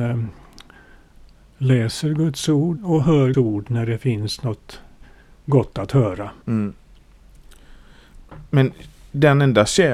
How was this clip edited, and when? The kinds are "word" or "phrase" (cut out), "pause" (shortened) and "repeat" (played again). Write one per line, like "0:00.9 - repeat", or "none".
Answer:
0:02.8 - word
0:03.3 - word
0:06.4 - pause